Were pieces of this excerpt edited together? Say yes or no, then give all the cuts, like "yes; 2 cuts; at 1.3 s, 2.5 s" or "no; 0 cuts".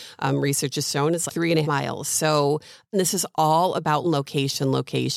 yes; 4 cuts; at 1.3 s, 1.6 s, 2.9 s, 4.0 s